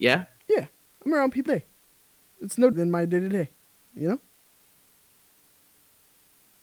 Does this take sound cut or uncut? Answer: cut